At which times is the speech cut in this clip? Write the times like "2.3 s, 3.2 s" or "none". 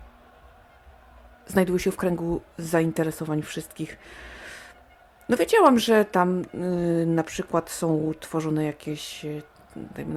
2.5 s